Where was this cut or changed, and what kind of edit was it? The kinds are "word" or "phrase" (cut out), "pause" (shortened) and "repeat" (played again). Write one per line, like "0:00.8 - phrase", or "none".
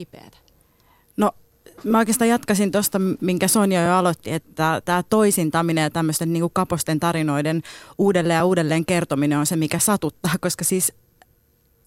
none